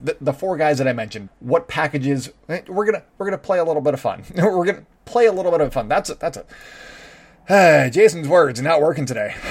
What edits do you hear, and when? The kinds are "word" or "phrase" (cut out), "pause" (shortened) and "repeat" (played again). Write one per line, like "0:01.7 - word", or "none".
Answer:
0:01.3 - word

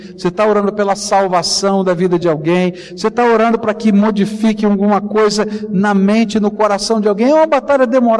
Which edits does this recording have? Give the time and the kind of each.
none

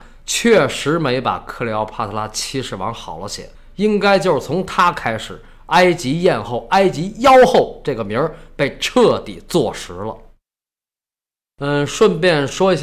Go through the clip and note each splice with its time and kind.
0:03.5 - pause

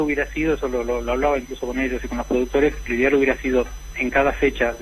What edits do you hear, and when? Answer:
none

